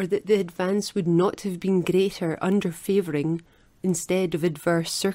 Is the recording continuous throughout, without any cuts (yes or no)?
yes